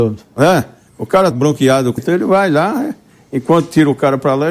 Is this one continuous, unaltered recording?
no; 2 cuts; at 1.3 s, 2.0 s

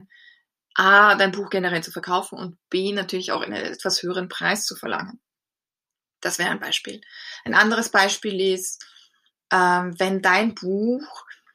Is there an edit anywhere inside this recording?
no; 0 cuts

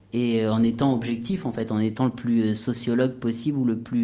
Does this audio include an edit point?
no; 0 cuts

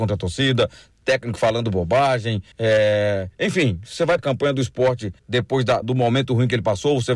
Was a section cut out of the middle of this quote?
yes; 4 cuts; at 2.5 s, 4.2 s, 5.2 s, 5.8 s

